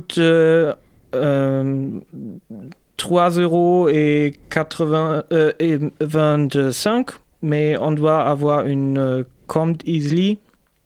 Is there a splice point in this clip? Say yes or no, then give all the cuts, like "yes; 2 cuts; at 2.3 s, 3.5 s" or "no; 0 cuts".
no; 0 cuts